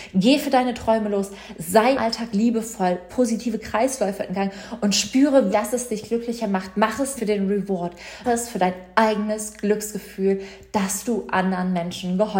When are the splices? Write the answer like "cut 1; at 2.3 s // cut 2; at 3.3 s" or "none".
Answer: cut 1; at 1.9 s // cut 2; at 3.1 s // cut 3; at 5.5 s // cut 4; at 7.2 s // cut 5; at 8.2 s